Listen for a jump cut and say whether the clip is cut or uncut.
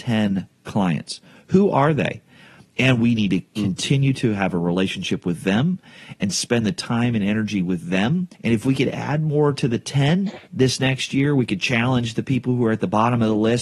cut